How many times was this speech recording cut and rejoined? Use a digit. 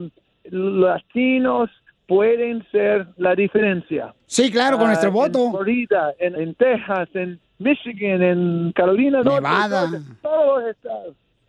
3